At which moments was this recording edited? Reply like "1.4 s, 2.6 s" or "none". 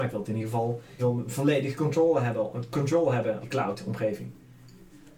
1.0 s, 3.4 s